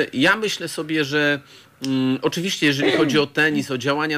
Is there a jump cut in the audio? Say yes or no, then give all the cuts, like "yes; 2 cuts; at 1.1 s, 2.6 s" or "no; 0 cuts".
no; 0 cuts